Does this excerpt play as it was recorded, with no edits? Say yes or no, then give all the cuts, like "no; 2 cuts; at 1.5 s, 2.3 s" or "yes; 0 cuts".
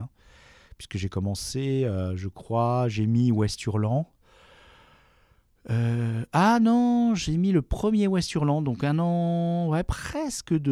yes; 0 cuts